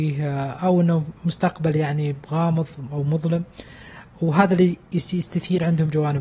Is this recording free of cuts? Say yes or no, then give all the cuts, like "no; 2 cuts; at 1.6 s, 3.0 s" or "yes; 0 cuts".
no; 1 cut; at 1.2 s